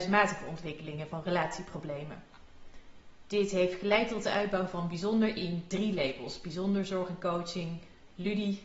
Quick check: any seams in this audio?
no; 0 cuts

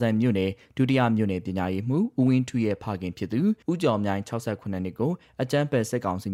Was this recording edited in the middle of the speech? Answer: yes; 1 cut; at 3.6 s

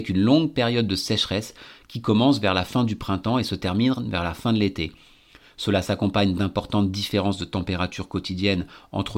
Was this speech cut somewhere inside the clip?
no; 0 cuts

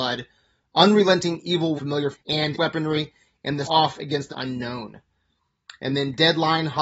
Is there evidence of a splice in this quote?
yes; 5 cuts; at 1.8 s, 2.1 s, 2.5 s, 3.6 s, 4.3 s

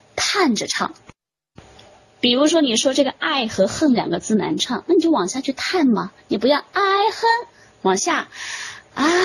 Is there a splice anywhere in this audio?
no; 0 cuts

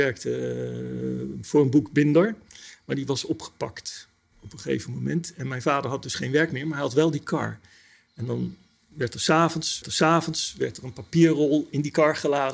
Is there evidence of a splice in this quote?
yes; 1 cut; at 9.8 s

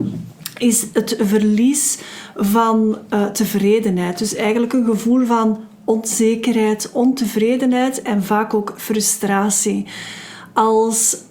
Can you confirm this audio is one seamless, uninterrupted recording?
yes; 0 cuts

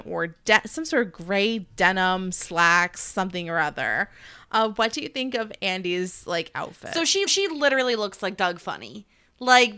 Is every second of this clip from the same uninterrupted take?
no; 1 cut; at 7.3 s

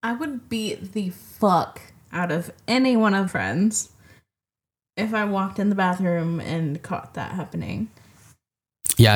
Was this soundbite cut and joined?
yes; 1 cut; at 3.3 s

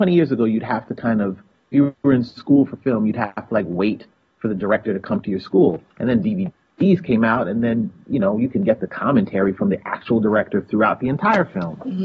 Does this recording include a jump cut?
no; 0 cuts

